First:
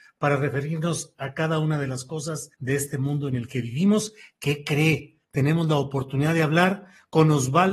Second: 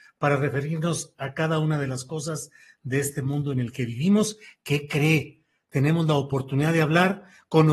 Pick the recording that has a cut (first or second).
first